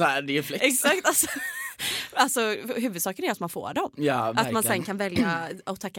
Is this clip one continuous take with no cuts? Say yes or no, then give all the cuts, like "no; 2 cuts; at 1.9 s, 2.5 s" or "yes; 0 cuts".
yes; 0 cuts